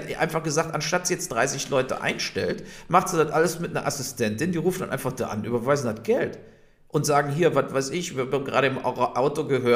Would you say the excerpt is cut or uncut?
uncut